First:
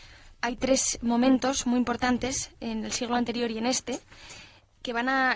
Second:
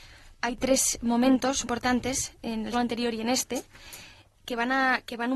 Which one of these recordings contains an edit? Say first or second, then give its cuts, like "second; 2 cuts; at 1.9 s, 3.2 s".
second; 2 cuts; at 1.6 s, 2.7 s